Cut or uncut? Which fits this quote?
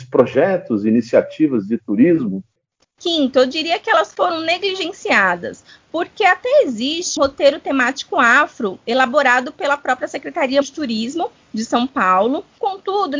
cut